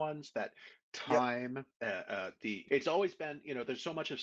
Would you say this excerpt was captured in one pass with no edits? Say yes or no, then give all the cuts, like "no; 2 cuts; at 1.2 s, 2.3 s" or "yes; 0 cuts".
no; 2 cuts; at 1.7 s, 2.7 s